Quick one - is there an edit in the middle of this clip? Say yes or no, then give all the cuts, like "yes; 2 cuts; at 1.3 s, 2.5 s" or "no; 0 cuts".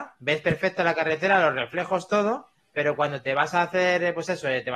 no; 0 cuts